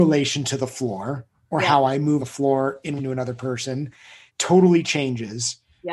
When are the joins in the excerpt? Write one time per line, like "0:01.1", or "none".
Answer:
0:02.2
0:03.0
0:04.3